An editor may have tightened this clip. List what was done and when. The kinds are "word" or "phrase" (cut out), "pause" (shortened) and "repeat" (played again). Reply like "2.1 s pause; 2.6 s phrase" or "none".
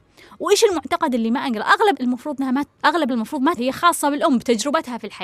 1.9 s word; 2.6 s word; 3.1 s word; 3.6 s word

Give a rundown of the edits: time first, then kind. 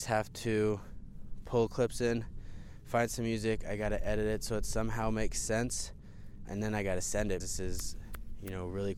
6.5 s word; 7.4 s word

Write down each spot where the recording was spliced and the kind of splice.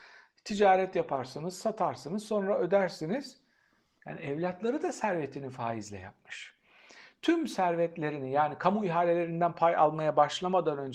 none

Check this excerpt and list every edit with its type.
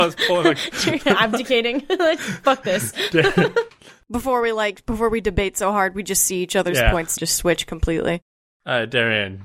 7.2 s phrase

